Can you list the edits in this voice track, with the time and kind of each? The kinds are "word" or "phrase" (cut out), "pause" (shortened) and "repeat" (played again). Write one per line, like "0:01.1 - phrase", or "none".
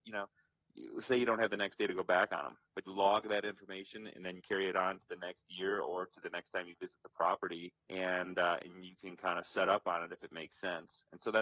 0:02.9 - word
0:04.4 - word
0:07.8 - pause

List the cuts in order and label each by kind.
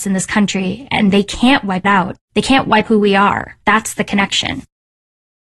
0:01.8 - word
0:02.2 - pause
0:02.9 - word
0:03.6 - pause

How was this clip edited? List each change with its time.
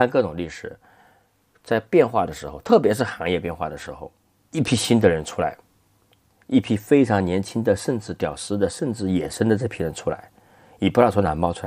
none

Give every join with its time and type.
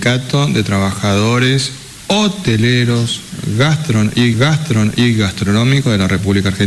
0:04.3 - repeat

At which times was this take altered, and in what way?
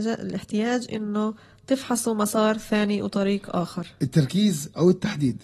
none

